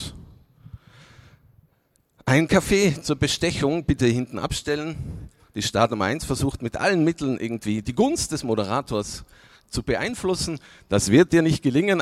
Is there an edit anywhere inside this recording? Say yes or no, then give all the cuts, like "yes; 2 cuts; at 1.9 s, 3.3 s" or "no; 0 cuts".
no; 0 cuts